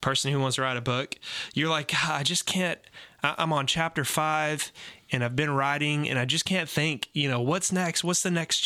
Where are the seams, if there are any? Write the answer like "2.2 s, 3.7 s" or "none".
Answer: none